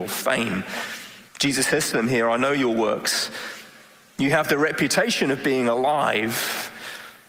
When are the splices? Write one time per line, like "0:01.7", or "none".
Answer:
0:01.3